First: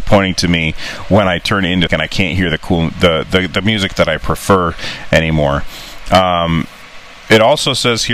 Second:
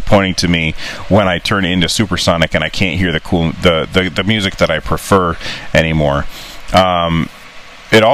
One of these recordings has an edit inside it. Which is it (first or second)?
first